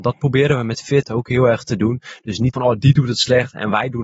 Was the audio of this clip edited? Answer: yes; 1 cut; at 2.5 s

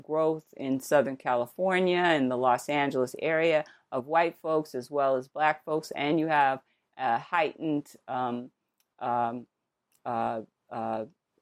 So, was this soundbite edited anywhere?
no; 0 cuts

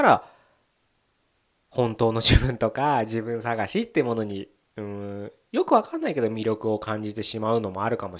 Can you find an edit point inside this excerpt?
no; 0 cuts

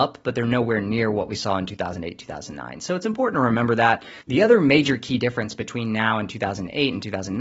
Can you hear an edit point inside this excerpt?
no; 0 cuts

